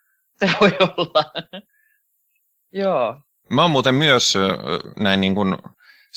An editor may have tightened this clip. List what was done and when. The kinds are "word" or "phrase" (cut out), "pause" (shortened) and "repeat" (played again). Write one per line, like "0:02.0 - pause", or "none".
0:01.7 - pause